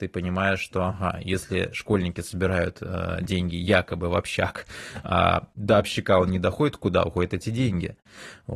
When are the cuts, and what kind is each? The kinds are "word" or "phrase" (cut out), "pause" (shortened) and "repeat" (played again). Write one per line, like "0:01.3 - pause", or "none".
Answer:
none